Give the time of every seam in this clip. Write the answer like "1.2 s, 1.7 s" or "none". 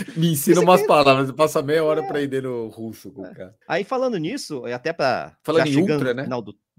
3.6 s